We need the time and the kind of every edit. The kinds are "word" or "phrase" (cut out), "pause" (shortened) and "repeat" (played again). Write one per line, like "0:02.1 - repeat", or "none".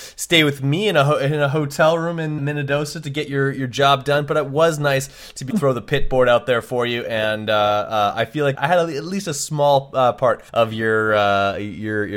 0:02.4 - word
0:05.5 - phrase
0:08.5 - word
0:10.5 - pause